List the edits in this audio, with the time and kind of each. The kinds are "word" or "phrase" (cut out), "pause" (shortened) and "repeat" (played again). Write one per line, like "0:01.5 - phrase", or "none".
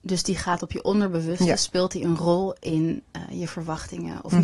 none